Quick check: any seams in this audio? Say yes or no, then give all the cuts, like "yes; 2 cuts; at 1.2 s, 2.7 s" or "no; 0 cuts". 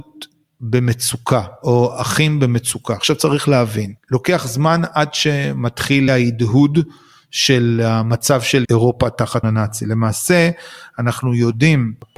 yes; 3 cuts; at 6.1 s, 8.6 s, 9.4 s